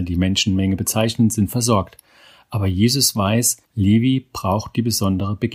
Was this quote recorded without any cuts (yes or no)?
no